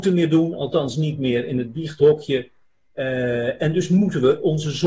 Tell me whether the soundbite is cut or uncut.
uncut